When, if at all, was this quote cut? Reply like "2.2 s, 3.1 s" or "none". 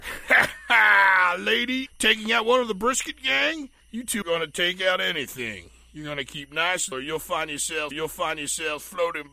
1.9 s, 3.8 s, 4.2 s, 6.9 s, 7.9 s